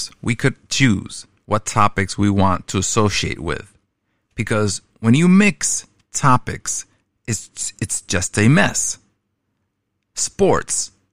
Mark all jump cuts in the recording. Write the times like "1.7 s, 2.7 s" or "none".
none